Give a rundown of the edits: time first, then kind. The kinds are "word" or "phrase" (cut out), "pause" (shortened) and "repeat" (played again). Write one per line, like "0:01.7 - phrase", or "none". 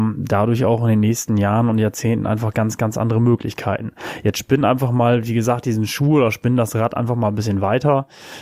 none